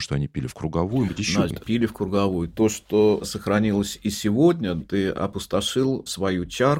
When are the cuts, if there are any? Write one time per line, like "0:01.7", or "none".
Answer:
0:01.1
0:01.5
0:04.8